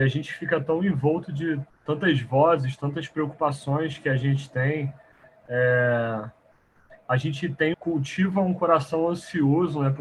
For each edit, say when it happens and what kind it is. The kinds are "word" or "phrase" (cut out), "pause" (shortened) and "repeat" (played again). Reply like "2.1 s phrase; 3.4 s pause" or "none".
1.7 s word; 7.7 s word